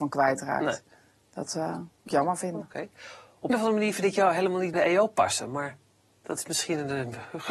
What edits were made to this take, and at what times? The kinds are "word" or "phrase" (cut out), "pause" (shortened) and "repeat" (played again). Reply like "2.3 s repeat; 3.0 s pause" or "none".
2.1 s word; 3.5 s word; 4.7 s word